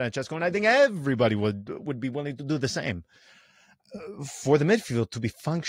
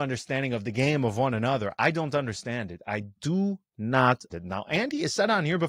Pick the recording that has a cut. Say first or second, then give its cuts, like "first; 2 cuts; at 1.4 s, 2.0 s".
second; 1 cut; at 4.3 s